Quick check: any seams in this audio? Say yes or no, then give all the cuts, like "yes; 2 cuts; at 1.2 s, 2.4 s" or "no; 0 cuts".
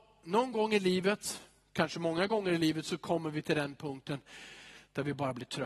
no; 0 cuts